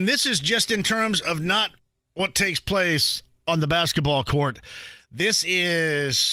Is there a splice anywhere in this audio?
yes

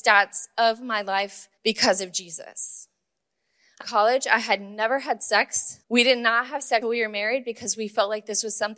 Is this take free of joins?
no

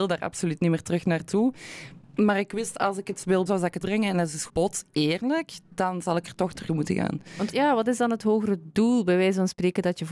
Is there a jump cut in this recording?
yes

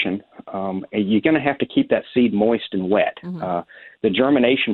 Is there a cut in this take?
no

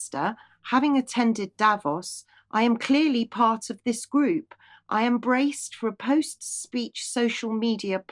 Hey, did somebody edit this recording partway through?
no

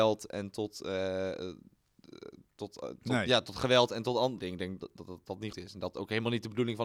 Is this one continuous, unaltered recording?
no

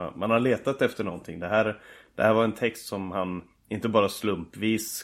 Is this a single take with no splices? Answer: yes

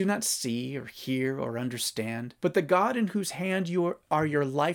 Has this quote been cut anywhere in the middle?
yes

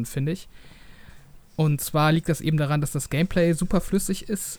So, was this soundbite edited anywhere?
no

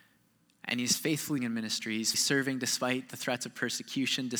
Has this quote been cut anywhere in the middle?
yes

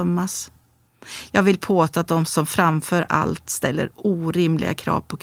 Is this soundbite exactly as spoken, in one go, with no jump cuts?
yes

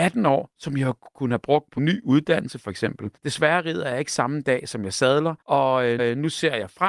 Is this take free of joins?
no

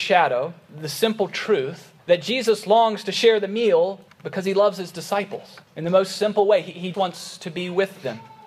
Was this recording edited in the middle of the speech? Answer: yes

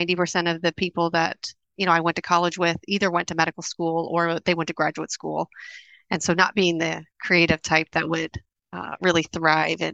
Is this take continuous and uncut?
yes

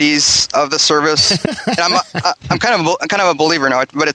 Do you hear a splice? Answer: no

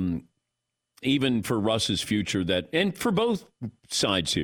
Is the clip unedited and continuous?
yes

